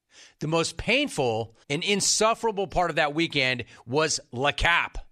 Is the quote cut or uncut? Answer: cut